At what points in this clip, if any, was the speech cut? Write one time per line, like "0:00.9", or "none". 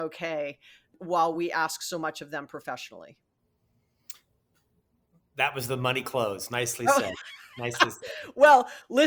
none